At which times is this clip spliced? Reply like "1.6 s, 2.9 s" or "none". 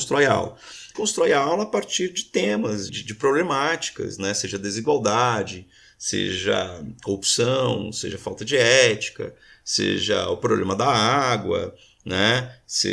0.9 s, 2.9 s